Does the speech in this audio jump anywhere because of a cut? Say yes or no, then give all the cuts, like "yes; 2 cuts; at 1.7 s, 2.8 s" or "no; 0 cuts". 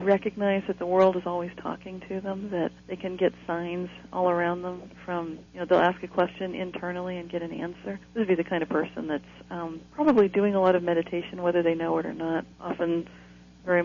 yes; 5 cuts; at 2.8 s, 5.5 s, 8.0 s, 9.9 s, 12.5 s